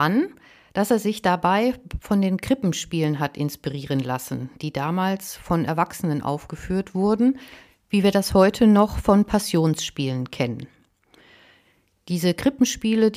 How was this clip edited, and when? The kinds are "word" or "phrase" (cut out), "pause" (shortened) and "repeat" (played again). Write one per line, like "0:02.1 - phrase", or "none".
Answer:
none